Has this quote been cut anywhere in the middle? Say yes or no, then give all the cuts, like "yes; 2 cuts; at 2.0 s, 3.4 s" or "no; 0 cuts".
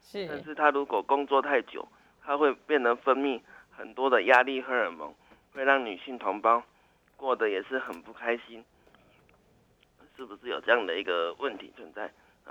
no; 0 cuts